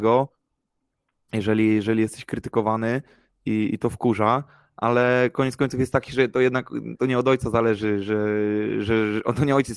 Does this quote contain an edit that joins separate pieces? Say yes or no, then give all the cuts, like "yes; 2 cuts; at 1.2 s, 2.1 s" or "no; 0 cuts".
no; 0 cuts